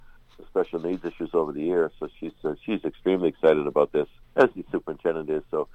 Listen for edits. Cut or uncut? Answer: cut